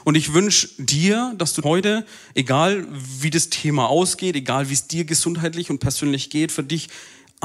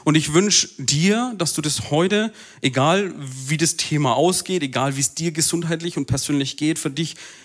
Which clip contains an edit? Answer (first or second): first